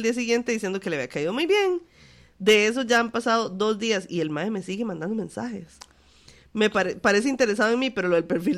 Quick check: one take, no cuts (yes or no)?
yes